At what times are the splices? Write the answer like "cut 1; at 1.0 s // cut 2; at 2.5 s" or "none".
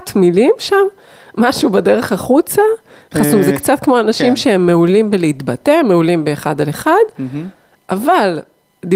none